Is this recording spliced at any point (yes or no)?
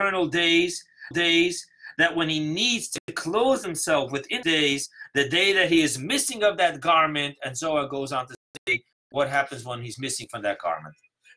yes